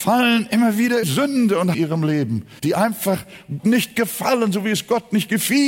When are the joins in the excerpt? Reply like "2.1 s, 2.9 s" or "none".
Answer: 1.0 s, 1.7 s, 2.6 s, 3.6 s